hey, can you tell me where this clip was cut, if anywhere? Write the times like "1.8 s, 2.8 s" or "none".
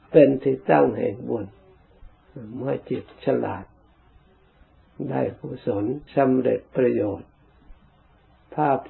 6.1 s